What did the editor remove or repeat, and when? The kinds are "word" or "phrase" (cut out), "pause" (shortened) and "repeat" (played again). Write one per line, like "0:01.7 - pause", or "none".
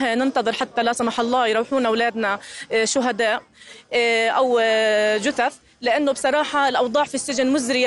none